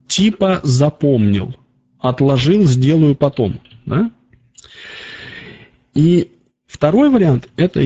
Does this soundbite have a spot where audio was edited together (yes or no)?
no